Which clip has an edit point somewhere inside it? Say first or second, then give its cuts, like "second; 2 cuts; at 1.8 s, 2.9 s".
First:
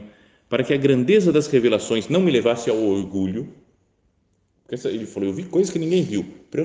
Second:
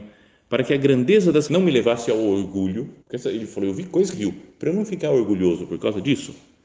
second; 3 cuts; at 1.5 s, 3.0 s, 4.1 s